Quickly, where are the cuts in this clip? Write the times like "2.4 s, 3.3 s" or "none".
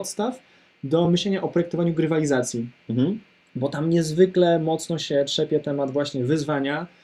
none